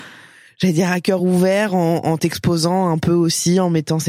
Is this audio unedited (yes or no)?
yes